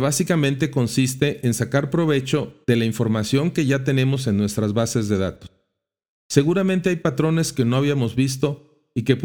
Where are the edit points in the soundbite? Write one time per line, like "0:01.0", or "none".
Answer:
0:02.6